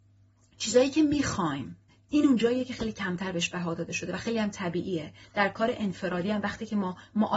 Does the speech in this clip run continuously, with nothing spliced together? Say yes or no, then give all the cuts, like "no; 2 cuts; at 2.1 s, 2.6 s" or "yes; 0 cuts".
no; 1 cut; at 1.9 s